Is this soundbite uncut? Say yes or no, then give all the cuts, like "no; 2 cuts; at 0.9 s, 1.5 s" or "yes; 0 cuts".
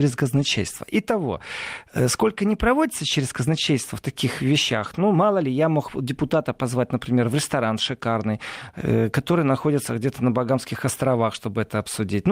yes; 0 cuts